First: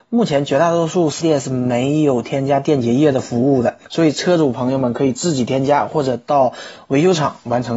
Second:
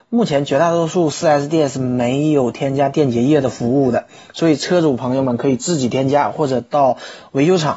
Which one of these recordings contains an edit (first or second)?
first